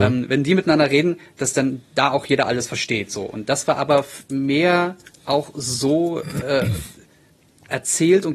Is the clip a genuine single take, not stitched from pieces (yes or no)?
yes